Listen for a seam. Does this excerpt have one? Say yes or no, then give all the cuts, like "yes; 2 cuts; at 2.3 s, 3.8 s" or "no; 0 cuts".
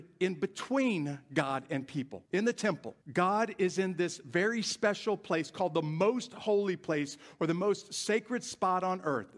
yes; 2 cuts; at 2.3 s, 3.0 s